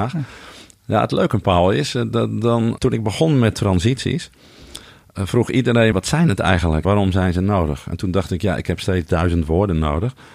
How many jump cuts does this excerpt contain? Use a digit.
3